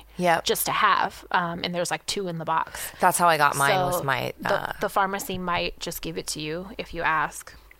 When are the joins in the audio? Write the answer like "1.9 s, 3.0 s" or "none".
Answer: none